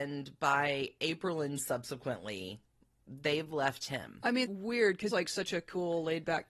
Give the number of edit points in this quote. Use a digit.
3